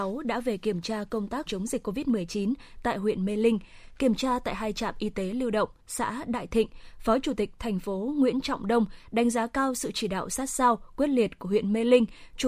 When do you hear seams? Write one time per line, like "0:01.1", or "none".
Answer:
0:01.5
0:05.8